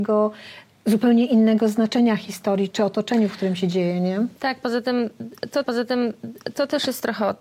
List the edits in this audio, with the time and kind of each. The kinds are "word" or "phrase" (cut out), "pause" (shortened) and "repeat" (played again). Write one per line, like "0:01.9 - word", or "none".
0:02.7 - word
0:04.4 - pause
0:05.6 - repeat